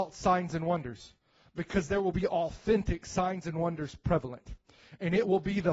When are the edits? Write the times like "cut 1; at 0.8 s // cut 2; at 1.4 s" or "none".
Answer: none